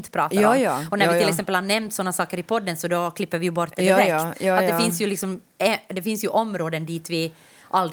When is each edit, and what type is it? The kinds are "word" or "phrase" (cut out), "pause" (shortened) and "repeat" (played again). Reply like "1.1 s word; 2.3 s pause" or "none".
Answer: none